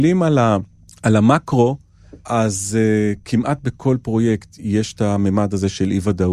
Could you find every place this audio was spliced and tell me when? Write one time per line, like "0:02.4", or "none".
none